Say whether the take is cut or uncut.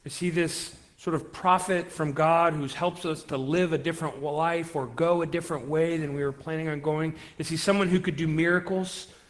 uncut